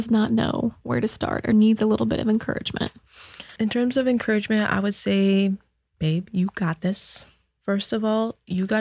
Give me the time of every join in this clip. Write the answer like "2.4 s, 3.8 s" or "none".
none